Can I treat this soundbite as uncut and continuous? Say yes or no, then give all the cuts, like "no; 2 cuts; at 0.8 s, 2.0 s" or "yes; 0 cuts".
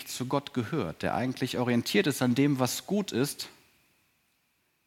yes; 0 cuts